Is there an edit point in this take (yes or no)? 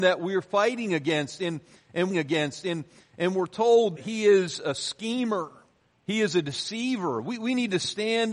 yes